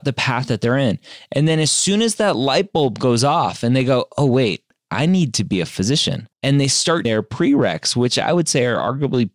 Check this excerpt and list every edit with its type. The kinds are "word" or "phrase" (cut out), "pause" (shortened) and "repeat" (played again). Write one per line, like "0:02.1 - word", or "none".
0:06.3 - pause
0:07.0 - word